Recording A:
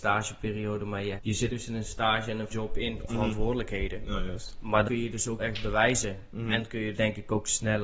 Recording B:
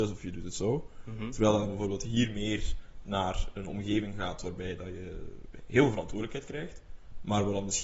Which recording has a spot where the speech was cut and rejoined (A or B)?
A